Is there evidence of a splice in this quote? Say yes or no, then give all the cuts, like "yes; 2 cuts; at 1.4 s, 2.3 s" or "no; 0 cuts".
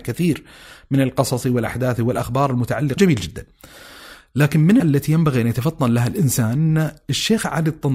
yes; 2 cuts; at 3.0 s, 4.8 s